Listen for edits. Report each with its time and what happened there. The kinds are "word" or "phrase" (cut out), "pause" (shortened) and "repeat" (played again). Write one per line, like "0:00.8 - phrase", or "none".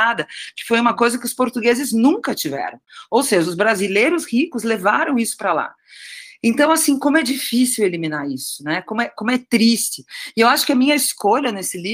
none